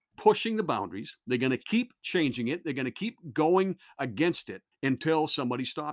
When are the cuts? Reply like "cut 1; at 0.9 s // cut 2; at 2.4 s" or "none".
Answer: cut 1; at 4.7 s